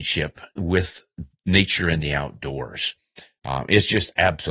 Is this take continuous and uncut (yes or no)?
yes